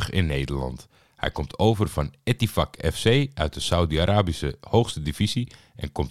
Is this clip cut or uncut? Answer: uncut